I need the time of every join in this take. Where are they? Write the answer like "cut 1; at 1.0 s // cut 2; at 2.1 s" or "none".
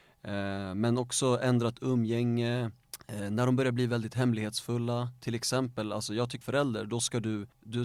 cut 1; at 6.4 s